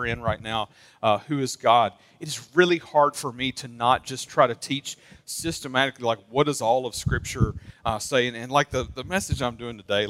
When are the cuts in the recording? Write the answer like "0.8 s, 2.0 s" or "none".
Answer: none